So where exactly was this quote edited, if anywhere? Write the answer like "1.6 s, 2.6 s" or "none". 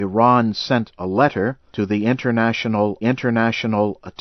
1.7 s, 3.0 s